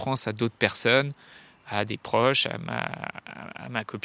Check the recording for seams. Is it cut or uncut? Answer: uncut